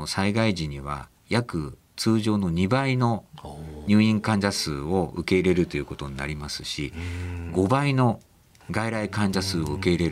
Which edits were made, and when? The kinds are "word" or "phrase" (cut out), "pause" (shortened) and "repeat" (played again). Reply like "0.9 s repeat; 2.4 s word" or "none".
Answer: none